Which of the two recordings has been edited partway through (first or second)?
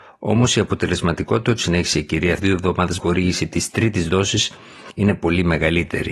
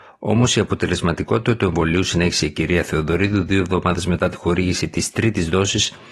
first